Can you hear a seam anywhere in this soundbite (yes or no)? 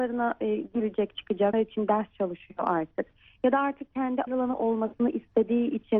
yes